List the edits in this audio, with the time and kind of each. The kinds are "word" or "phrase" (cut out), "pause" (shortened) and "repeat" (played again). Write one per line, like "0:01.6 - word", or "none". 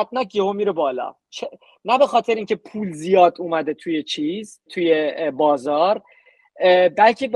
0:04.7 - word